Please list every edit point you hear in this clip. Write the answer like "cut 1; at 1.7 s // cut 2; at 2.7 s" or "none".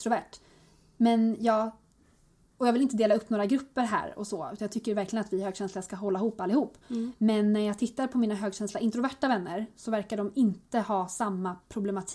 none

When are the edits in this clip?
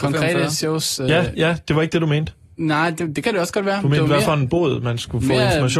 none

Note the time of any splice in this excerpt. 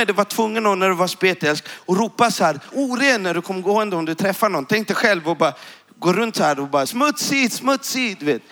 cut 1; at 2.7 s // cut 2; at 6.9 s

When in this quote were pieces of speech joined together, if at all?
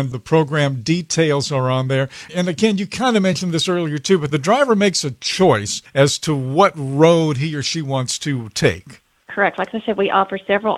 cut 1; at 4.3 s

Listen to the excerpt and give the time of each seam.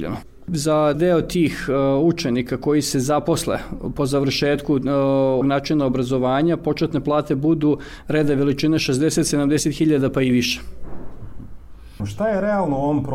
cut 1; at 0.9 s // cut 2; at 5.4 s

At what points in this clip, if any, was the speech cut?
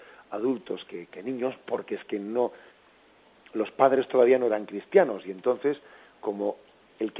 none

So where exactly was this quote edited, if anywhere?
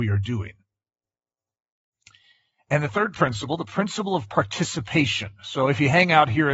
none

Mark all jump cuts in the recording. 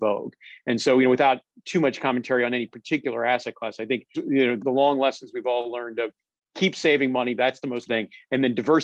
cut 1; at 4.1 s // cut 2; at 4.6 s // cut 3; at 7.9 s

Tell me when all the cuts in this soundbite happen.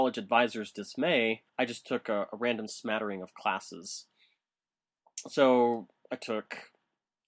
cut 1; at 1.5 s

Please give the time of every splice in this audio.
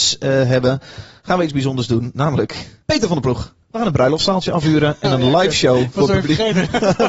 cut 1; at 2.8 s // cut 2; at 3.6 s

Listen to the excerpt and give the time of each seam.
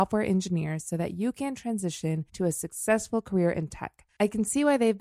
cut 1; at 2.3 s

